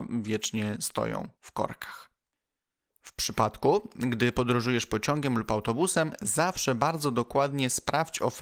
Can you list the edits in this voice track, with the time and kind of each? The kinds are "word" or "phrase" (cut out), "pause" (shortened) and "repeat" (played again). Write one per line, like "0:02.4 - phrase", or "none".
0:01.3 - pause